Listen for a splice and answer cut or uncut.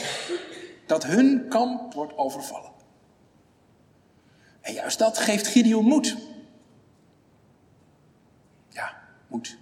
cut